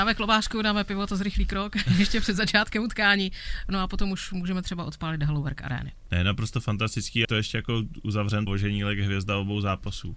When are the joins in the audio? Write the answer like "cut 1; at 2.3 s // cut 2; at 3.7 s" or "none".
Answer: cut 1; at 7.2 s // cut 2; at 8.5 s